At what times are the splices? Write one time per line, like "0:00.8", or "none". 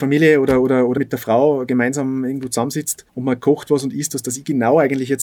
0:01.0
0:03.1